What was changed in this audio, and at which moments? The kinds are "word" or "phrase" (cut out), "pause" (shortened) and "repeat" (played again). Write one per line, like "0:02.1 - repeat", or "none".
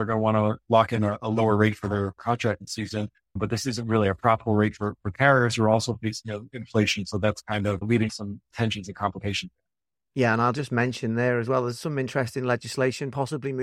none